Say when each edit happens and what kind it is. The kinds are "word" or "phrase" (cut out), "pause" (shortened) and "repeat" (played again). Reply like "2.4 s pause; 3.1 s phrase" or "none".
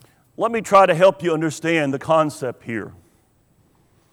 none

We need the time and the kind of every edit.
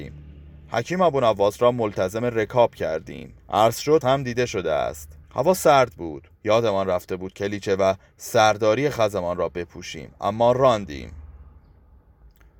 3.4 s pause; 4.0 s word; 5.2 s pause; 6.3 s pause

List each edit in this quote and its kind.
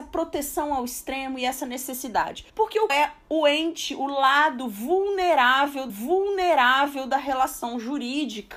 2.5 s pause; 2.9 s word; 5.9 s repeat

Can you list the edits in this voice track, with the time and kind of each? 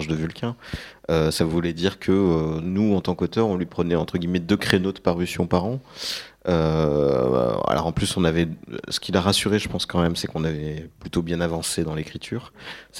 none

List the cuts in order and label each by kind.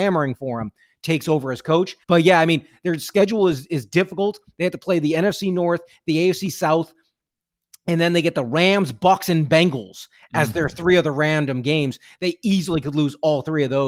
2.0 s pause

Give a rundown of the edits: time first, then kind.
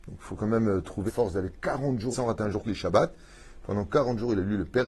1.1 s word; 2.1 s word; 2.6 s word

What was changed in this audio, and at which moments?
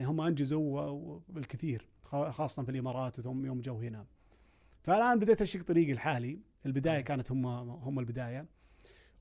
none

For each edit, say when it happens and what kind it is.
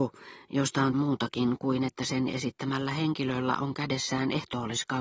0.9 s word

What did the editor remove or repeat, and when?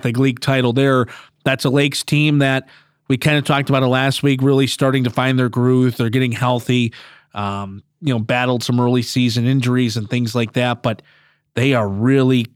none

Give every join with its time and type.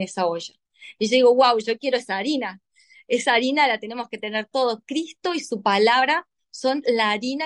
none

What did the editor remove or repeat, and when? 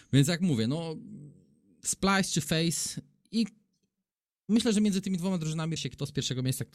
5.8 s word

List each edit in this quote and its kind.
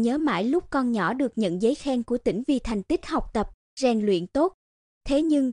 none

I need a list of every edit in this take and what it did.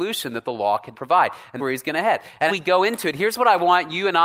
0.9 s word; 1.6 s word; 2.5 s word

